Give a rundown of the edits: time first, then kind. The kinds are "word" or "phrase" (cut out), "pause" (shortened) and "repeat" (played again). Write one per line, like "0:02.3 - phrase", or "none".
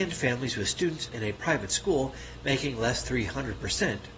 0:01.1 - word
0:03.0 - word

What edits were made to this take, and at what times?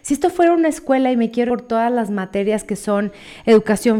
0:01.5 - word

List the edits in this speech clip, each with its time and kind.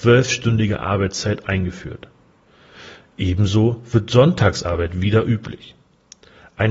none

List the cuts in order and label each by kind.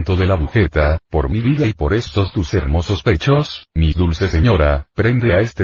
none

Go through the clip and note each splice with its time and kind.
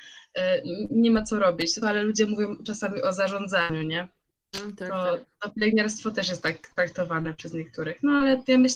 0:01.8 - phrase

